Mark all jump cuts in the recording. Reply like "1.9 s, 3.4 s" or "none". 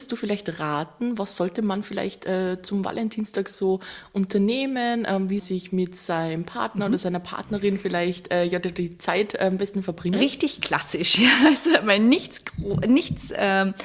5.4 s